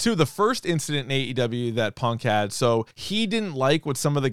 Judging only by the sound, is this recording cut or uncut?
cut